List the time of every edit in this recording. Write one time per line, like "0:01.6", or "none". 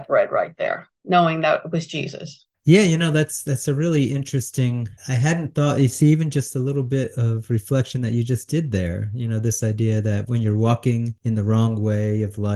0:02.5
0:05.0